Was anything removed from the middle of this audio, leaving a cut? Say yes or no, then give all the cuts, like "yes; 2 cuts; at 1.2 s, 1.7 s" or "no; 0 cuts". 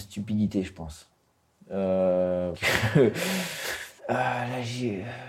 yes; 2 cuts; at 2.5 s, 4.0 s